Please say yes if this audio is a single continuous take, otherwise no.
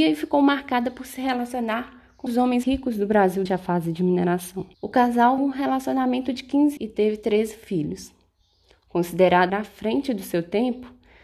no